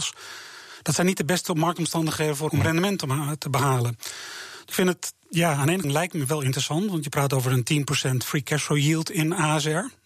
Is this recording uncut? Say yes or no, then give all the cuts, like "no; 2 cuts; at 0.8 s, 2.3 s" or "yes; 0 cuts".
no; 3 cuts; at 2.5 s, 4.7 s, 5.8 s